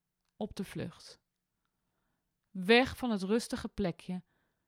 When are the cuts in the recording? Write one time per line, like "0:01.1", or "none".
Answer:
none